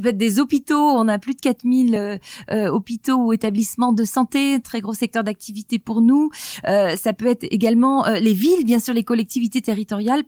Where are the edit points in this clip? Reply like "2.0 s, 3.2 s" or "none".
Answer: none